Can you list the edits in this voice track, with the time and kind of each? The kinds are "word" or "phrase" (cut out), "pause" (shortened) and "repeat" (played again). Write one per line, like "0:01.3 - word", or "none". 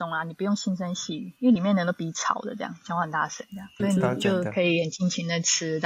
0:03.8 - word

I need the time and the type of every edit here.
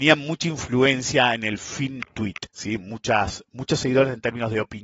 0:02.5 - pause

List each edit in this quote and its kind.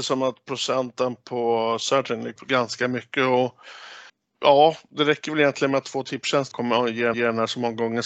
0:02.4 - phrase
0:04.1 - pause
0:06.5 - word
0:07.1 - repeat

